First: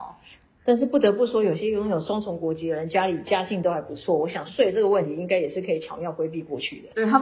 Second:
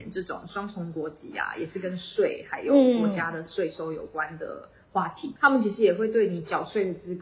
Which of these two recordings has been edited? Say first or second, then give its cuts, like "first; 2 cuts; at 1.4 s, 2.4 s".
second; 1 cut; at 5.4 s